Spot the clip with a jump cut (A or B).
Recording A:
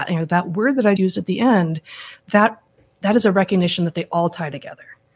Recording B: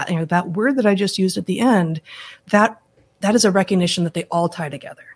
A